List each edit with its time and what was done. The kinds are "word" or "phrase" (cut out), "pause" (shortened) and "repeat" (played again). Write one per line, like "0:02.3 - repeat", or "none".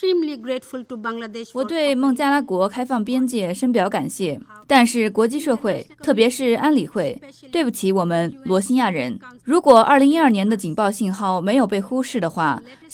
0:04.6 - pause
0:05.9 - pause
0:09.4 - pause